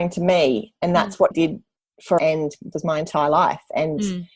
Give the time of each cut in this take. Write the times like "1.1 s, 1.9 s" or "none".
1.3 s, 2.2 s, 2.7 s